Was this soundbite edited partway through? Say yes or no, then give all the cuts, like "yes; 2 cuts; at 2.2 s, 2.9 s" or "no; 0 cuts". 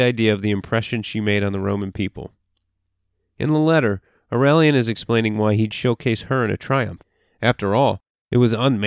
no; 0 cuts